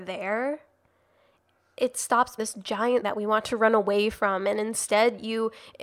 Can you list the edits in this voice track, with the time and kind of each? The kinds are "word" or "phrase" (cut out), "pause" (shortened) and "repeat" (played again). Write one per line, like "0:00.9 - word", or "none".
0:02.4 - word
0:03.0 - word